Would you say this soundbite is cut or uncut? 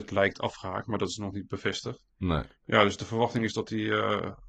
uncut